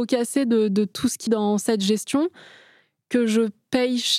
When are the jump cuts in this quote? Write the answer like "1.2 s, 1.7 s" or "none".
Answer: 1.3 s

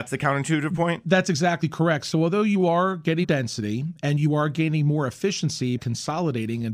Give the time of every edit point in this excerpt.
3.2 s, 5.8 s

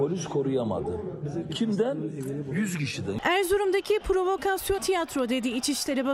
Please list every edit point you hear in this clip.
4.8 s

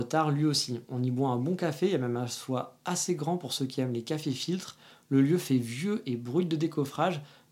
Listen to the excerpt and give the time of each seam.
none

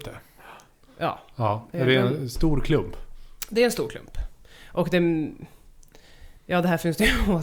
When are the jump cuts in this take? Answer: 6.4 s

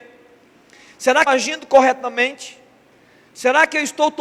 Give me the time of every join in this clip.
1.3 s

